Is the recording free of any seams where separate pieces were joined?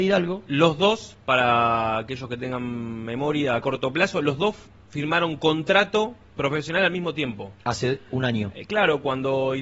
yes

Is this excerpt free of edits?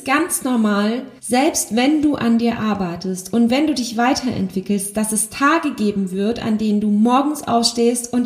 no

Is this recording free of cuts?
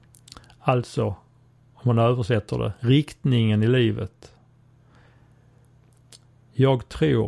yes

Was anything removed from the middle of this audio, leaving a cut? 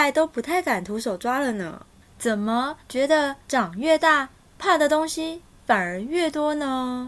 yes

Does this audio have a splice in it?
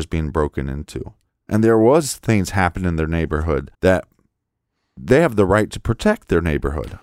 yes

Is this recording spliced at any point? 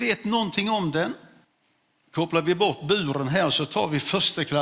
yes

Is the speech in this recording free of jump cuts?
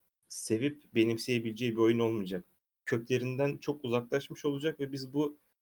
yes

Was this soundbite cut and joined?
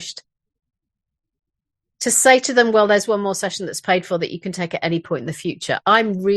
no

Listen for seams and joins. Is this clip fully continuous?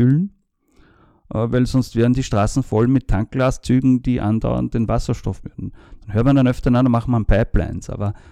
no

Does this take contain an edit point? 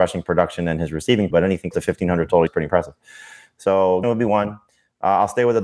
yes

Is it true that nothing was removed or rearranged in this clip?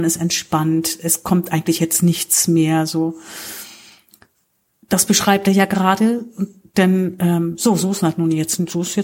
yes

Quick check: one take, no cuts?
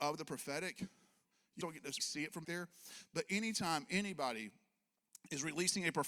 no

